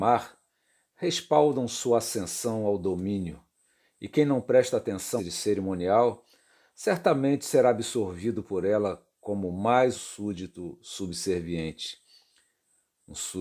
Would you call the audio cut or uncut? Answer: cut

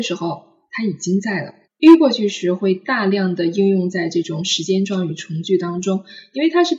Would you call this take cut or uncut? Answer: cut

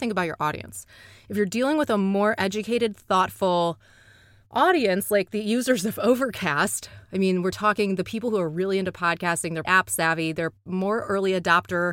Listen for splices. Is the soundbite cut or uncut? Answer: cut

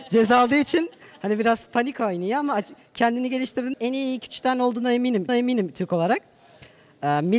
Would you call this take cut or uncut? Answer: cut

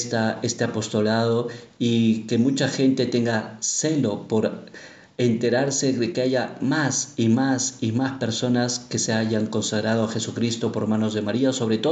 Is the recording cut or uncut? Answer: uncut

